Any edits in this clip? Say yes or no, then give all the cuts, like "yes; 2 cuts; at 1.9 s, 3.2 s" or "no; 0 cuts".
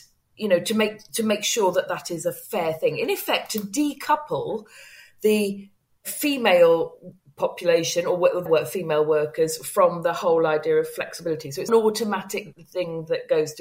yes; 2 cuts; at 8.5 s, 11.7 s